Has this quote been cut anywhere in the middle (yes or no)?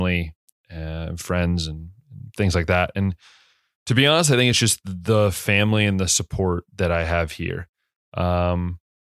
no